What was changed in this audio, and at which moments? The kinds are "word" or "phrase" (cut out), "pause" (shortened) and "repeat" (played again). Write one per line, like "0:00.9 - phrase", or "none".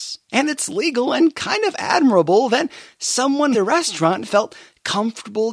0:03.5 - phrase